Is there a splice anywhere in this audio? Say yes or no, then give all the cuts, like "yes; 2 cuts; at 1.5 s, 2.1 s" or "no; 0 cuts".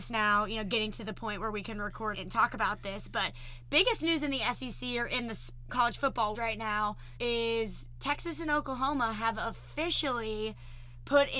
yes; 4 cuts; at 2.1 s, 5.7 s, 6.3 s, 7.2 s